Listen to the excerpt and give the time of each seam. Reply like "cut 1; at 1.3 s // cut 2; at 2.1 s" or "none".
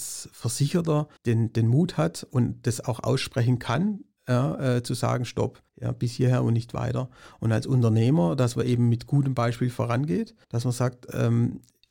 cut 1; at 1.2 s // cut 2; at 5.7 s // cut 3; at 10.4 s